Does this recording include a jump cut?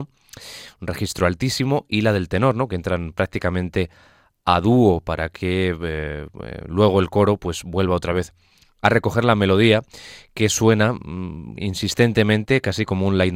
no; 0 cuts

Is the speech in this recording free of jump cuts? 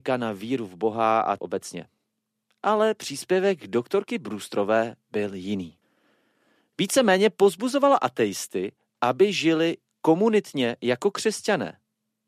no; 1 cut; at 1.4 s

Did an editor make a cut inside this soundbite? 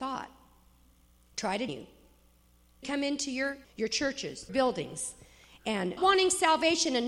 yes; 5 cuts; at 1.7 s, 2.8 s, 3.6 s, 4.5 s, 6.0 s

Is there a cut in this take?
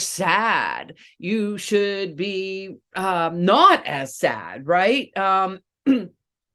no; 0 cuts

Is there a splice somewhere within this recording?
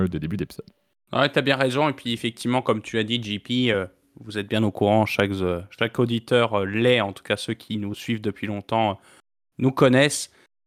no; 0 cuts

